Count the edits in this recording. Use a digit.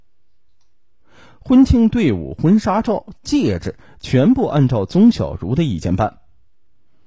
0